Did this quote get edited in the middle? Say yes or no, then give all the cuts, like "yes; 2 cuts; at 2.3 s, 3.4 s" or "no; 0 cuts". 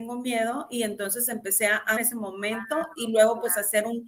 yes; 1 cut; at 2.0 s